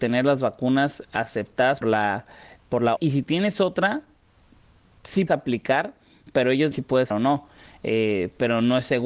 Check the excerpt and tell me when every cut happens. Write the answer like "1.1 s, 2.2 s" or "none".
1.8 s, 3.0 s, 5.3 s, 6.7 s, 7.1 s